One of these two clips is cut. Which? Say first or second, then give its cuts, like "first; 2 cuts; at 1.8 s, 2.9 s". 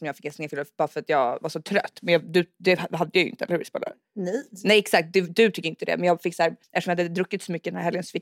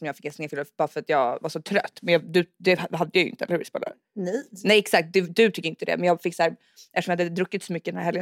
first; 1 cut; at 6.6 s